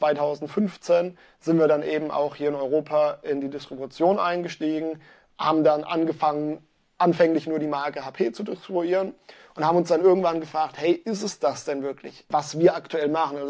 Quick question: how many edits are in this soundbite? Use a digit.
0